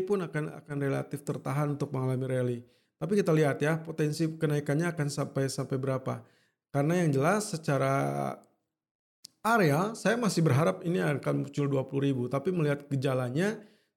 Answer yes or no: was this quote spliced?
no